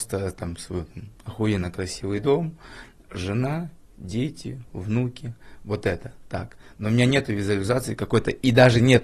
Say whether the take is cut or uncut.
uncut